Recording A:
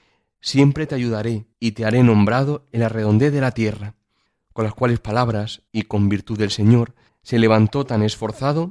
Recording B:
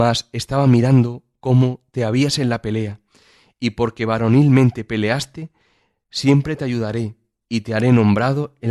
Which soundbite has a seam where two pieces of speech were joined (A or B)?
A